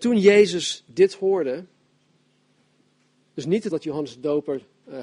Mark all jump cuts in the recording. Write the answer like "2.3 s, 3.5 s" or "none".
3.7 s